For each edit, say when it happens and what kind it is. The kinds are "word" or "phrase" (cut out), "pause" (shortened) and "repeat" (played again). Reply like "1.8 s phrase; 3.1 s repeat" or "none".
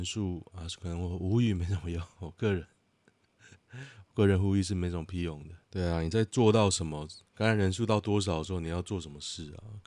5.6 s pause; 7.3 s pause